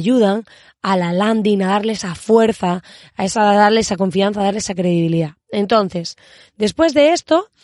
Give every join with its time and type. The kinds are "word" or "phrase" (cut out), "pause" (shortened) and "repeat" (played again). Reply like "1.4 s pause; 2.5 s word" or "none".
none